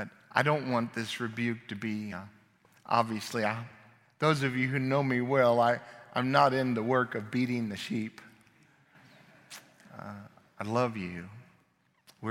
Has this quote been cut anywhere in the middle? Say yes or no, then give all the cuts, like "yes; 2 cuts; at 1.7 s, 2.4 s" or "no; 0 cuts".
no; 0 cuts